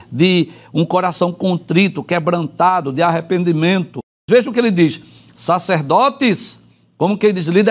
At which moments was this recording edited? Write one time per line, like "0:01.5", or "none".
none